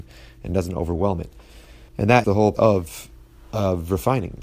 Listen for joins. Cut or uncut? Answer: cut